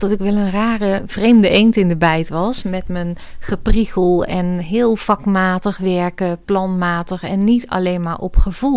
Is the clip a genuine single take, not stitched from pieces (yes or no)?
yes